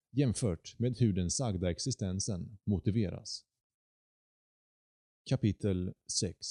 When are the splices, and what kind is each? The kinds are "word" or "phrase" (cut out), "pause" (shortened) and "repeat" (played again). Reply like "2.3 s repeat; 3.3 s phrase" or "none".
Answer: none